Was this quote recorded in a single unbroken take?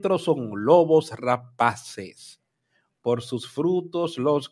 yes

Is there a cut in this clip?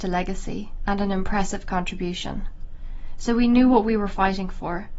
no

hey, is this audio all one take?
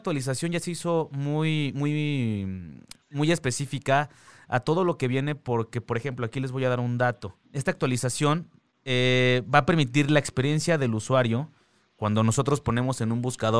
no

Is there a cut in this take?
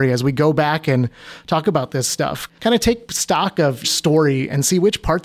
yes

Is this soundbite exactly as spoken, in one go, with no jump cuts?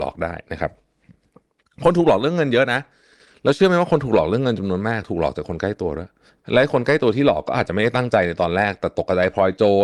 no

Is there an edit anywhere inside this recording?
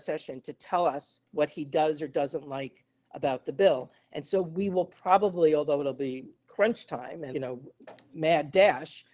yes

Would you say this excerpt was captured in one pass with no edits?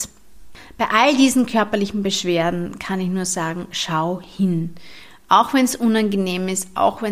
yes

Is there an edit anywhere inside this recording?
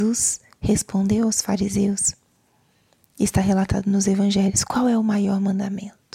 no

